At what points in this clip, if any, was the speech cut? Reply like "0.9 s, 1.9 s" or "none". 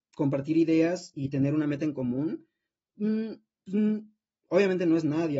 none